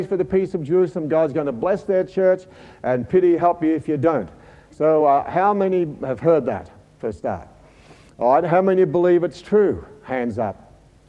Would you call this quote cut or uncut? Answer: uncut